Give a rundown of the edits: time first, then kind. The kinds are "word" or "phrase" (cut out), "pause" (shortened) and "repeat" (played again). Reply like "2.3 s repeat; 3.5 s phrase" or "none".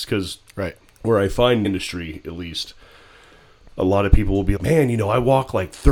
1.6 s word; 4.6 s word